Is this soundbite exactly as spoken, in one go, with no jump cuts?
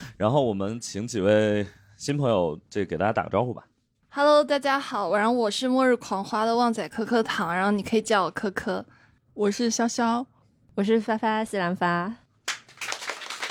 yes; 0 cuts

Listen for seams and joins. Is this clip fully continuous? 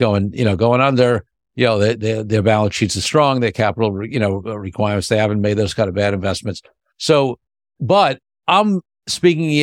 yes; 0 cuts

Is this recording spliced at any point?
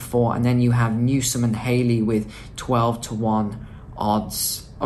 no; 0 cuts

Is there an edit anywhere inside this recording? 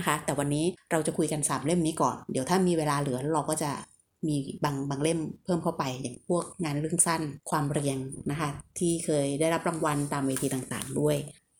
yes; 1 cut; at 7.4 s

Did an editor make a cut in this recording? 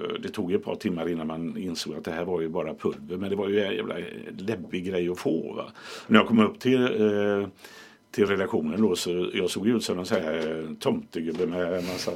no; 0 cuts

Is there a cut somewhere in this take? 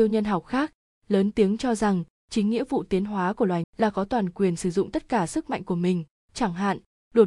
yes; 1 cut; at 3.6 s

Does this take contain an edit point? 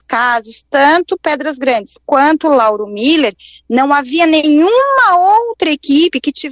no; 0 cuts

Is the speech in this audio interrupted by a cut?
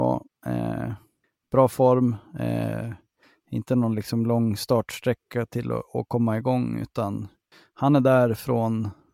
no; 0 cuts

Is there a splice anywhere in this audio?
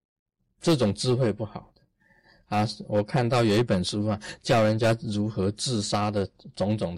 no; 0 cuts

